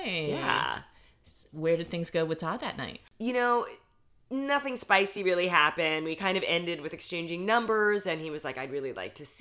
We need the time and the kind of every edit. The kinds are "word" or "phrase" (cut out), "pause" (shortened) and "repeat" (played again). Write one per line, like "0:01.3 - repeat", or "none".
none